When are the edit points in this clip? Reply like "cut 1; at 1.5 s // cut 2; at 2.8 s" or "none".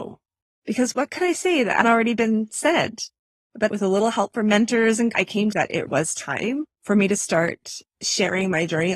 cut 1; at 1.8 s // cut 2; at 3.7 s // cut 3; at 5.1 s // cut 4; at 5.5 s // cut 5; at 5.9 s // cut 6; at 6.7 s // cut 7; at 7.8 s